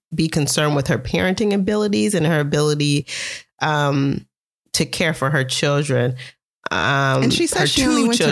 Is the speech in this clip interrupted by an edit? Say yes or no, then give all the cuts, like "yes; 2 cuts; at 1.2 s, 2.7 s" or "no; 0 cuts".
no; 0 cuts